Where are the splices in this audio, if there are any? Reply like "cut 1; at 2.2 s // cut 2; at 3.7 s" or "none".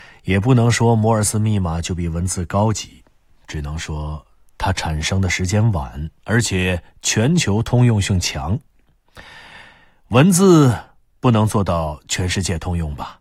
cut 1; at 6.2 s